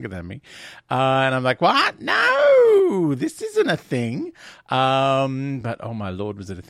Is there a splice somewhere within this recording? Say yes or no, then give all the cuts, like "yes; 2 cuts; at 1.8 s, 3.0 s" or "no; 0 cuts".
no; 0 cuts